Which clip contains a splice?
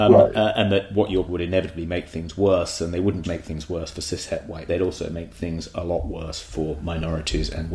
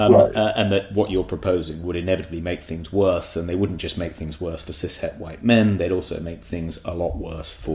first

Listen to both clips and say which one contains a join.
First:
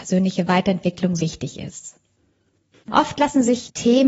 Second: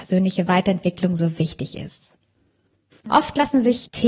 first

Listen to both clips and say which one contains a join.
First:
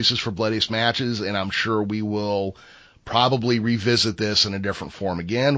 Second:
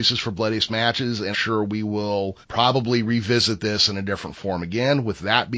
second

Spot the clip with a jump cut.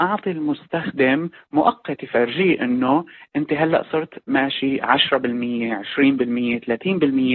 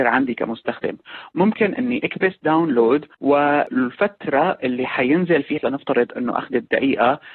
second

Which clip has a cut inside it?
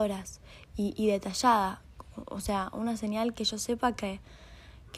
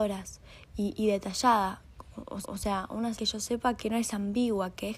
second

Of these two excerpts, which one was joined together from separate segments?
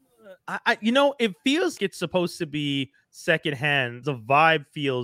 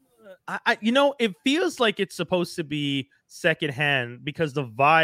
first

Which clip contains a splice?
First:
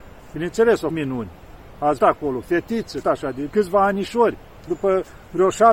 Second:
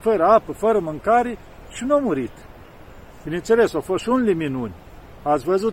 first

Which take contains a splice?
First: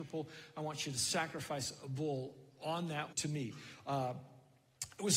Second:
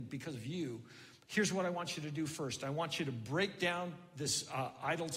first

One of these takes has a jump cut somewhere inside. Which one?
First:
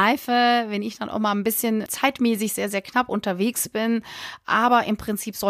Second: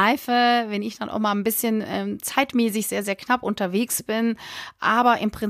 first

